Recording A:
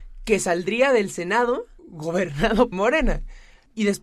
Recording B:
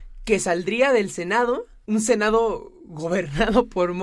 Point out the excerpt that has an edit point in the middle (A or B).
A